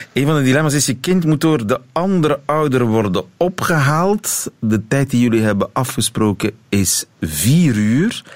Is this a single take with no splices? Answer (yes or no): yes